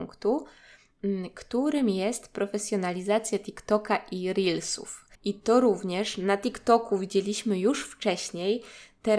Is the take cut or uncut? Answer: cut